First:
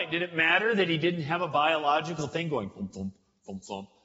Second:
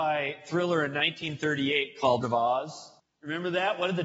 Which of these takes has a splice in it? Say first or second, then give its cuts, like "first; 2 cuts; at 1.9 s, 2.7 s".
second; 2 cuts; at 2.2 s, 3.0 s